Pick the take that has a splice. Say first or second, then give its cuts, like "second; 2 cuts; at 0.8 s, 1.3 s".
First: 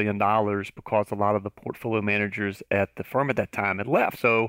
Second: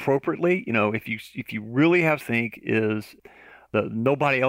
second; 1 cut; at 2.2 s